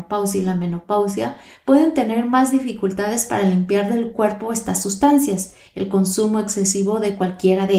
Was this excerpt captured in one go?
yes; 0 cuts

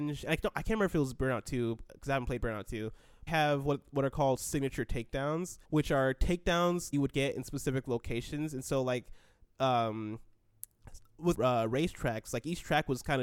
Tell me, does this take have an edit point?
yes; 4 cuts; at 3.3 s, 5.6 s, 6.9 s, 11.3 s

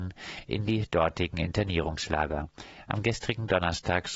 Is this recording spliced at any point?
no; 0 cuts

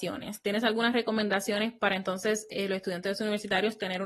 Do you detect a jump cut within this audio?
no; 0 cuts

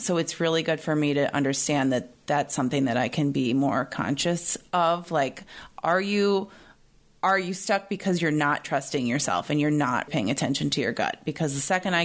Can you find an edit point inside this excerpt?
yes; 1 cut; at 10.1 s

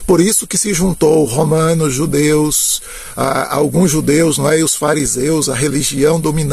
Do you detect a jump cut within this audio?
no; 0 cuts

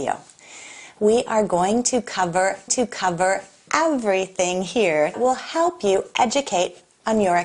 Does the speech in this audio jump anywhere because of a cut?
yes; 2 cuts; at 2.7 s, 5.1 s

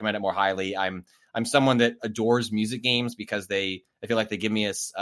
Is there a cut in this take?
no; 0 cuts

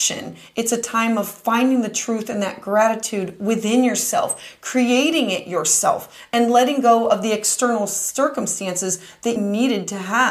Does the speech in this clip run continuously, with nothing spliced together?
no; 1 cut; at 9.4 s

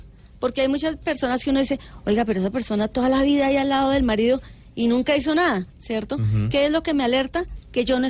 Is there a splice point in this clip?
yes; 1 cut; at 5.7 s

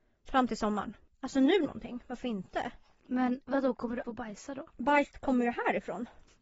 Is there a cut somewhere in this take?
yes; 3 cuts; at 1.6 s, 4.0 s, 4.7 s

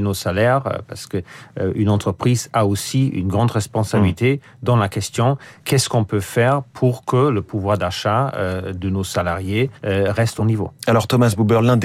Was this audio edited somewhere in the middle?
yes; 2 cuts; at 9.7 s, 10.4 s

